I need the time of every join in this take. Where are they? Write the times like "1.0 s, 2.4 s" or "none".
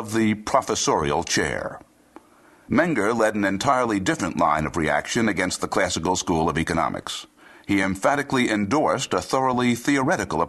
none